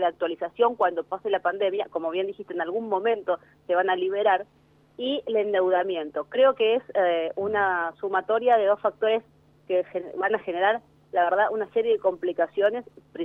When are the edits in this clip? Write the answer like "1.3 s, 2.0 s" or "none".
none

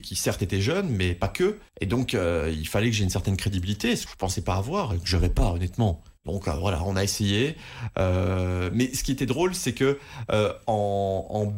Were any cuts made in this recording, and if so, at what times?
1.7 s, 4.1 s, 6.2 s

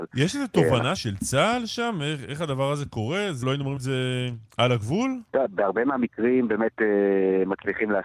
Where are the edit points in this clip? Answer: 1.0 s, 3.4 s, 3.8 s, 4.5 s, 5.3 s

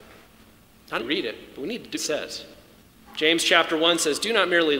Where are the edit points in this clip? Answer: 1.0 s, 1.9 s, 2.7 s

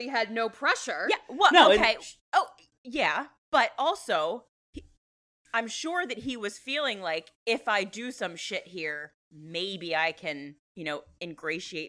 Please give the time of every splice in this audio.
2.2 s, 7.4 s, 10.6 s

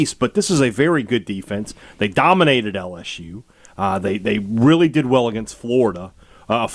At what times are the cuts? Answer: none

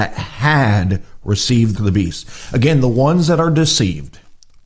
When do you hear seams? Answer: 1.7 s

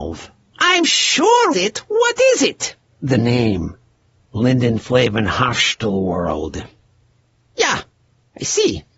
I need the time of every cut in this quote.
1.5 s, 2.8 s

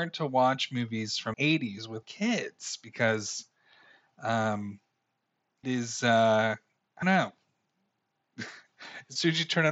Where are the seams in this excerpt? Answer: 1.3 s, 2.0 s, 5.6 s, 7.0 s

